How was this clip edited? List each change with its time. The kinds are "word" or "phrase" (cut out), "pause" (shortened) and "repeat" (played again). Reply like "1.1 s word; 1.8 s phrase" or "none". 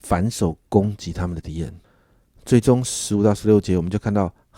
1.8 s pause

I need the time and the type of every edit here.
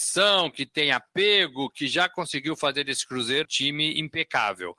3.4 s word

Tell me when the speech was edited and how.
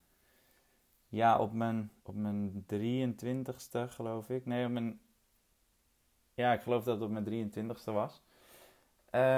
2.0 s pause

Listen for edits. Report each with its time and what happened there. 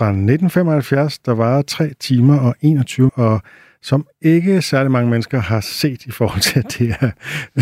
3.1 s word

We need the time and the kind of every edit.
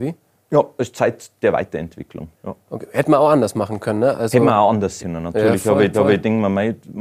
2.3 s pause; 5.0 s word; 5.9 s repeat

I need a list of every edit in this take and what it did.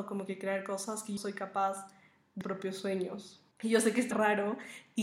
1.2 s word; 2.4 s phrase; 3.5 s pause; 4.1 s word

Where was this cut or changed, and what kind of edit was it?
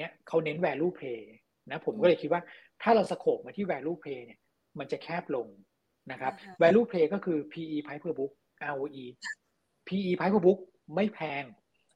none

